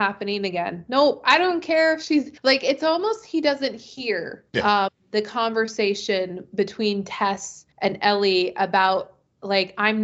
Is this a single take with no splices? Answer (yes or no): no